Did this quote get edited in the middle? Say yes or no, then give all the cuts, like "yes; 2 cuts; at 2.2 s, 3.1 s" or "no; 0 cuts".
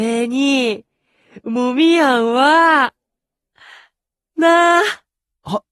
no; 0 cuts